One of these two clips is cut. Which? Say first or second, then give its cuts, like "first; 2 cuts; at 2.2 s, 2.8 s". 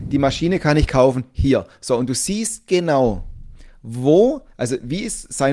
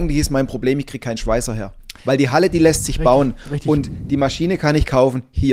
second; 1 cut; at 2.0 s